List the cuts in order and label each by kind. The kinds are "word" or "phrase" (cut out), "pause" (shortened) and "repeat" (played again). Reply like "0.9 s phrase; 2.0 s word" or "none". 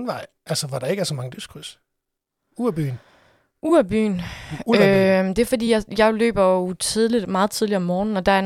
none